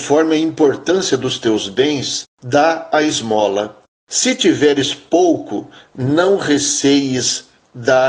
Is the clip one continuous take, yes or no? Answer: yes